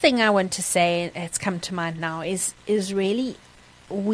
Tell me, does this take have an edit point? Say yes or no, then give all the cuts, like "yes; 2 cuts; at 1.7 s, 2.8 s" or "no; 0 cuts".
no; 0 cuts